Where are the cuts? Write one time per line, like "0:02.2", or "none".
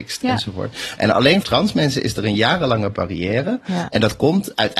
0:01.4